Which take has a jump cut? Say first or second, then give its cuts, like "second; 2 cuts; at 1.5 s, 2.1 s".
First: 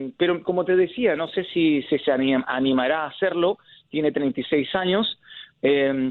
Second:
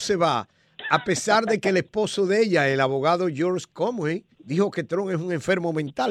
second; 1 cut; at 4.3 s